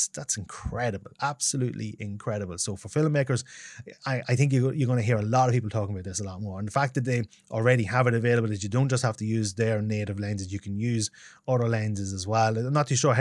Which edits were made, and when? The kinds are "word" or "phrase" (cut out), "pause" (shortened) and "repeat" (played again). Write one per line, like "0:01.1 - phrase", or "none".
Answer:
none